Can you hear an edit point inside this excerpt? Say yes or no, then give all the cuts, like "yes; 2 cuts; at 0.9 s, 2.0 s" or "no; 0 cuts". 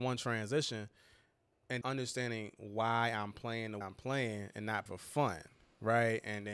yes; 3 cuts; at 1.8 s, 3.8 s, 4.9 s